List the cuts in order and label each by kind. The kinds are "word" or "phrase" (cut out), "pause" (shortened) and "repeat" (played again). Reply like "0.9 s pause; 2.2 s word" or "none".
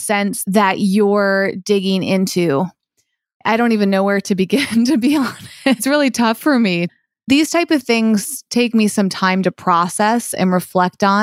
none